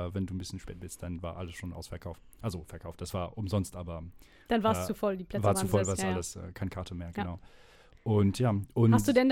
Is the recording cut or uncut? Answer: uncut